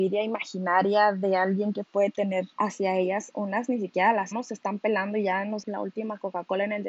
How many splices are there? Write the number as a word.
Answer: three